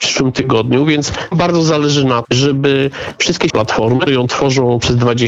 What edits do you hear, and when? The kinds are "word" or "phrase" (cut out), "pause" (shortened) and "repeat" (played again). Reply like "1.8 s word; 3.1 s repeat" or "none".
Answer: 1.3 s word; 2.2 s word; 3.5 s word; 4.1 s word